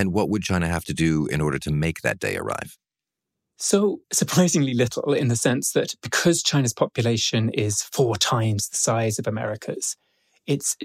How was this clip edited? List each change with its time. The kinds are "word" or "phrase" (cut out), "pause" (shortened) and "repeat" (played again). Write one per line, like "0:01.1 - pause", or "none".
0:04.0 - pause